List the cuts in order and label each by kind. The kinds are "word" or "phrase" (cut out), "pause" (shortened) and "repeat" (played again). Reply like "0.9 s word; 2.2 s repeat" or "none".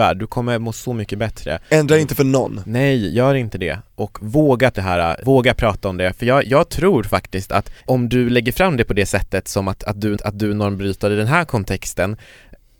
4.7 s word; 7.8 s pause; 10.2 s repeat